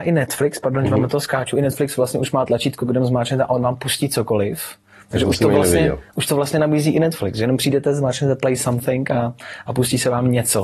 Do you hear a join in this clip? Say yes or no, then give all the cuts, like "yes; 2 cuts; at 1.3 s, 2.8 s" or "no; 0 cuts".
no; 0 cuts